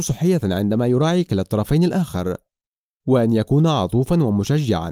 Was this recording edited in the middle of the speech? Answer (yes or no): no